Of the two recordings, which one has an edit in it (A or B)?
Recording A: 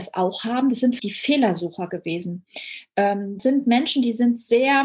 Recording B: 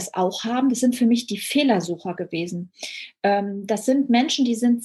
A